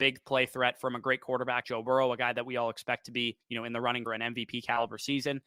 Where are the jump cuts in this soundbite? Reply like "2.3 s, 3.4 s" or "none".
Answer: 1.6 s, 3.4 s, 4.1 s